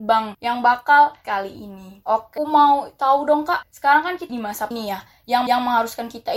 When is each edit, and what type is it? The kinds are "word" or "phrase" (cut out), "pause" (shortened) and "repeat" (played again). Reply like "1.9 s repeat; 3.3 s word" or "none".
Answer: 1.2 s phrase; 2.4 s word; 4.3 s word; 4.7 s word; 5.5 s repeat